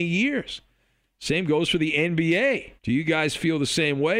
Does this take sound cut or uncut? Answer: cut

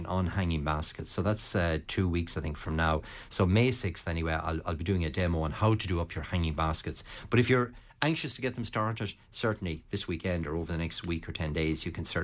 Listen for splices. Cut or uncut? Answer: uncut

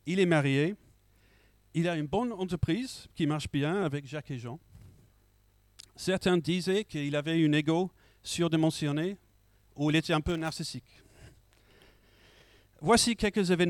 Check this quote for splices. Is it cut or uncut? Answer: uncut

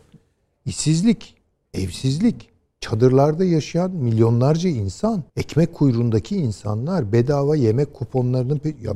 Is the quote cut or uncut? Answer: cut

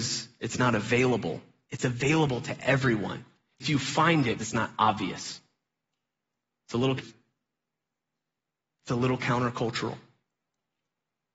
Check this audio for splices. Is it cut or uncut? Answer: cut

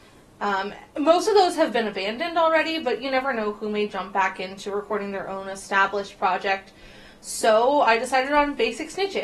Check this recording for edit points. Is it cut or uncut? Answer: uncut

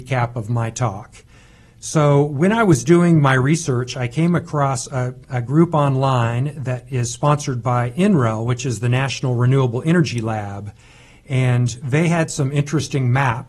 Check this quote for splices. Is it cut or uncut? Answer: uncut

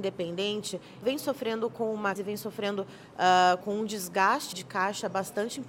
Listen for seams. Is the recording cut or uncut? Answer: cut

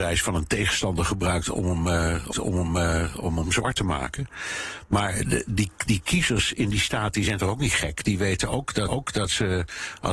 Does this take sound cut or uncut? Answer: cut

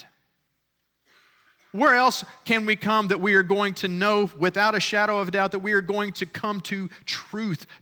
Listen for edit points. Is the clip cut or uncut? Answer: uncut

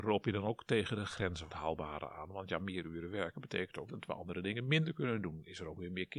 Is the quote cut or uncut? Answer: cut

